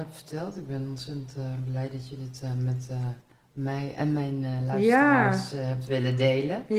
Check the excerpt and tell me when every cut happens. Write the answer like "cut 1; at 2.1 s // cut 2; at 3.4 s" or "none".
none